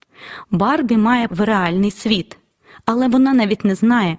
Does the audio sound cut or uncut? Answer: cut